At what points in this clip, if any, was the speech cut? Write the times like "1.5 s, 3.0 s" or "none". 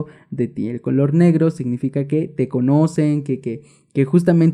none